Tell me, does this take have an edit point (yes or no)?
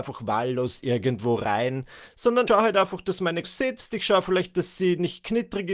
yes